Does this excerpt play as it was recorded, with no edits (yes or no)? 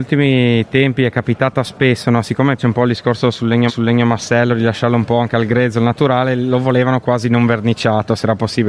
no